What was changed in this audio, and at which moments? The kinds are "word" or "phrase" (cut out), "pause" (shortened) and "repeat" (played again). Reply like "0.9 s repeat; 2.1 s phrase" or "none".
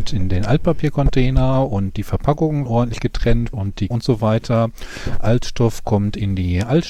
2.7 s word; 3.5 s word; 3.9 s word